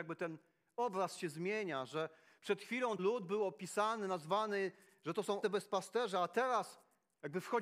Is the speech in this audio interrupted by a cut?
yes; 2 cuts; at 3.0 s, 5.4 s

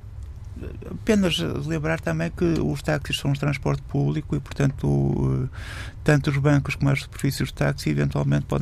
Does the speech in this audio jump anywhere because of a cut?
no; 0 cuts

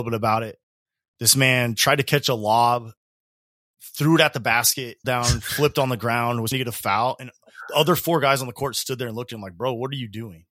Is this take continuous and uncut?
no; 2 cuts; at 5.0 s, 6.5 s

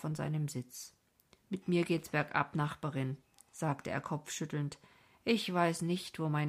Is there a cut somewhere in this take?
no; 0 cuts

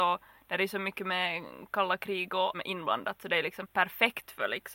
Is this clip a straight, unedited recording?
no; 2 cuts; at 2.5 s, 3.6 s

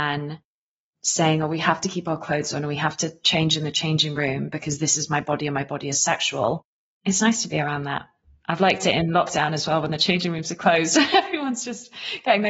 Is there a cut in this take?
no; 0 cuts

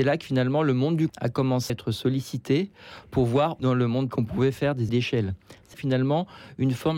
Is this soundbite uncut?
no; 6 cuts; at 1.1 s, 1.7 s, 3.6 s, 4.1 s, 4.9 s, 5.7 s

